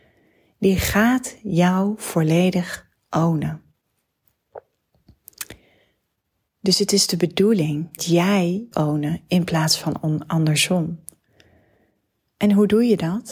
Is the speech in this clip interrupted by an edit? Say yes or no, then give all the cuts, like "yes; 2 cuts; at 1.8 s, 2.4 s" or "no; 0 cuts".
yes; 2 cuts; at 8.0 s, 8.7 s